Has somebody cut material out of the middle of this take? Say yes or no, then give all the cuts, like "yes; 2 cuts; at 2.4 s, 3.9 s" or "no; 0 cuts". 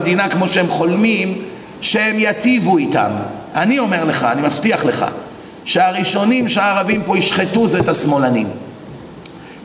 no; 0 cuts